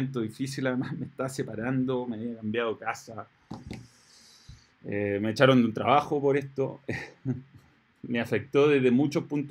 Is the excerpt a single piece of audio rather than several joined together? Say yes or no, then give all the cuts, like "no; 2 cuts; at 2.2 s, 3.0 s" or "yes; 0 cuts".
yes; 0 cuts